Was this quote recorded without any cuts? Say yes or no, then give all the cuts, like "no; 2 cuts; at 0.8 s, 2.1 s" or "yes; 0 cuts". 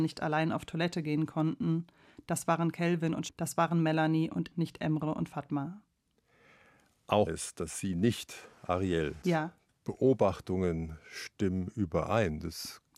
no; 4 cuts; at 3.3 s, 4.5 s, 7.3 s, 9.2 s